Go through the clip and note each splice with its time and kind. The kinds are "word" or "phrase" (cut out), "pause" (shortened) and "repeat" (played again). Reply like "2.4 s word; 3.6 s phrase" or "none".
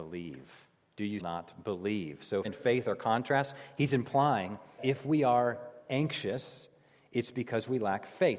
1.2 s word; 2.4 s word; 4.8 s word